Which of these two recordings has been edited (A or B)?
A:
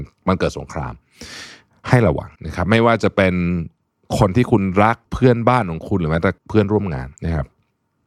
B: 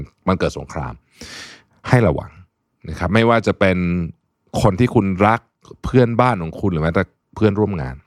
A